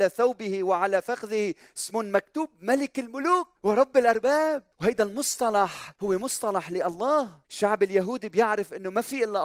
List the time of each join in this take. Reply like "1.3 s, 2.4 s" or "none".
3.6 s, 4.7 s, 5.9 s, 7.4 s

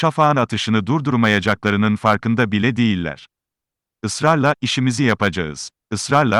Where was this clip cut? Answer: none

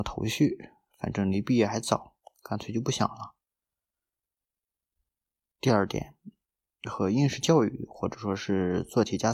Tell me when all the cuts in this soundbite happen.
none

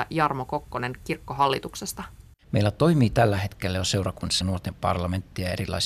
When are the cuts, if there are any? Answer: 2.3 s, 4.4 s

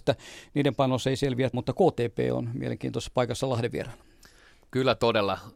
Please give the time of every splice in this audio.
1.5 s

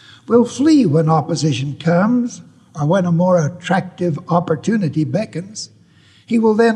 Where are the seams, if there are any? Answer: none

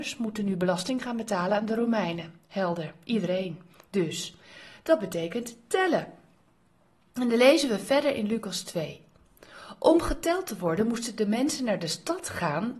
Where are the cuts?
none

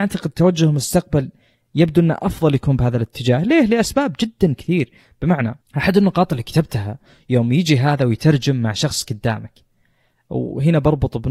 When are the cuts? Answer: none

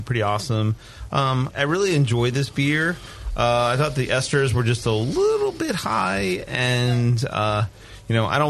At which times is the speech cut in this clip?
1.5 s

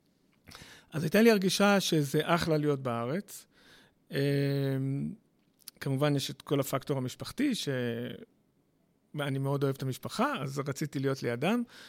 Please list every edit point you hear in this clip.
none

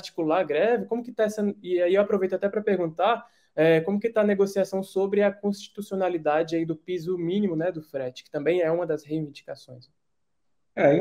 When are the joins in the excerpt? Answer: none

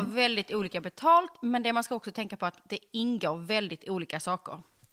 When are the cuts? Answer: none

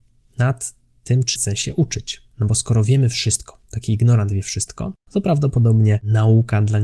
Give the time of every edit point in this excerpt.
1.4 s

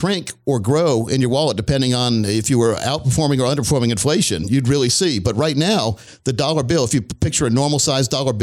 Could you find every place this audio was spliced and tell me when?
none

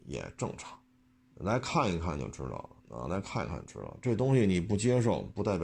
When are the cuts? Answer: 1.3 s, 2.8 s

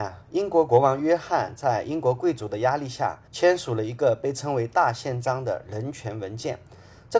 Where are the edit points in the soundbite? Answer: 3.3 s

